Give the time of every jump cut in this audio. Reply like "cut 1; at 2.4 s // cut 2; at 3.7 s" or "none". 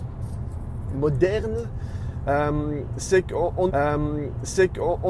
cut 1; at 3.7 s

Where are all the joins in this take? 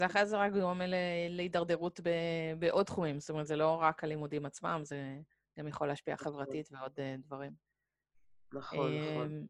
none

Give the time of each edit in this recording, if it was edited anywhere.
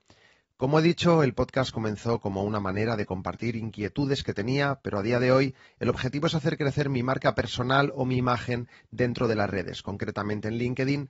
none

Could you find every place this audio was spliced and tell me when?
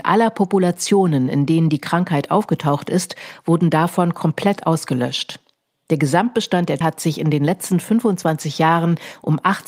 cut 1; at 6.8 s

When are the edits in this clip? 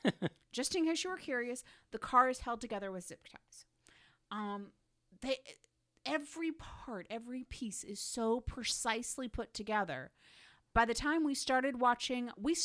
none

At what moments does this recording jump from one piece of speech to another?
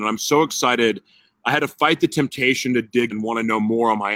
cut 1; at 3.1 s

